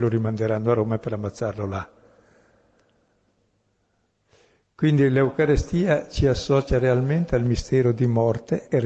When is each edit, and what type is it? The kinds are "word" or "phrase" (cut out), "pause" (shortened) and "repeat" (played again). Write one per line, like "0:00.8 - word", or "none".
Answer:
none